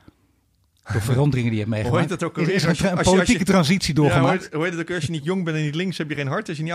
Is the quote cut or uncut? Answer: uncut